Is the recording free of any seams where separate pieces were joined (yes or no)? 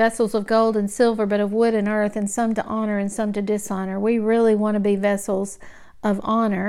yes